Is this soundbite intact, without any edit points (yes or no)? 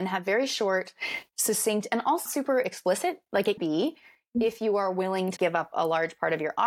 no